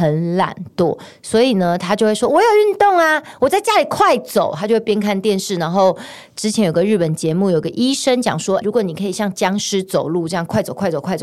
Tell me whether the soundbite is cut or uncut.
cut